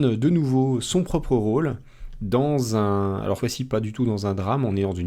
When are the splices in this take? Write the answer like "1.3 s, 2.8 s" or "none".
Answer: 3.4 s